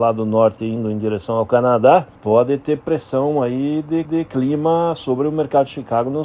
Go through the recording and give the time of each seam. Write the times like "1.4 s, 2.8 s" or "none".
2.2 s, 4.0 s